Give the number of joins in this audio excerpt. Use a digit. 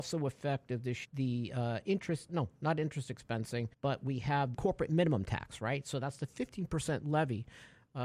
4